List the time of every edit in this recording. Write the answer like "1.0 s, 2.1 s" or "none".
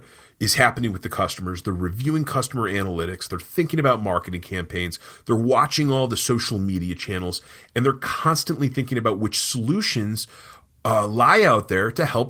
none